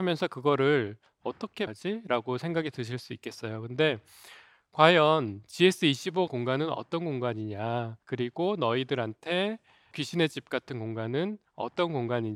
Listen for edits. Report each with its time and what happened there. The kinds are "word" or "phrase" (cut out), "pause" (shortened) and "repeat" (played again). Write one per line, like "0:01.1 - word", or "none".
0:01.7 - word
0:06.3 - word
0:08.0 - pause
0:09.9 - word